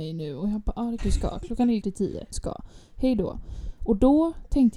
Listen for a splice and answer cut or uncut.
cut